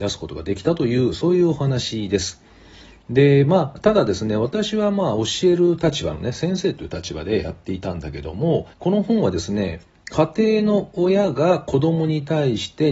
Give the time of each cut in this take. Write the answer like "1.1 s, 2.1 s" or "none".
8.7 s